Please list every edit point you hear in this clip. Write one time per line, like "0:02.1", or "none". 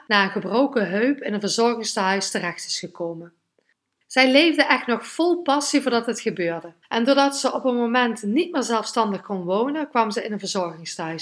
0:06.8